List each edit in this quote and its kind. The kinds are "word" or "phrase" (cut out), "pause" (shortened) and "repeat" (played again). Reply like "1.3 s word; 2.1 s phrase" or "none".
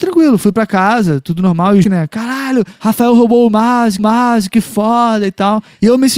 1.8 s word; 4.0 s repeat